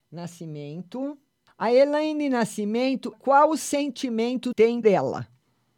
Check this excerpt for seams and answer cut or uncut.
cut